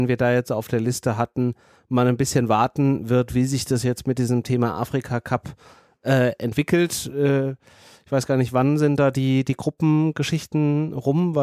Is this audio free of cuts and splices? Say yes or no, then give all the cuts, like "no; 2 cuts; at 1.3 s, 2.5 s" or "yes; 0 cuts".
yes; 0 cuts